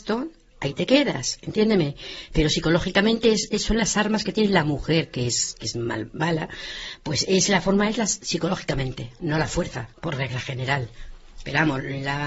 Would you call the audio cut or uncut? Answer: cut